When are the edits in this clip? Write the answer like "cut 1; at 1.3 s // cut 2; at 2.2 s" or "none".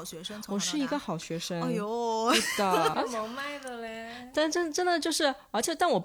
cut 1; at 2.9 s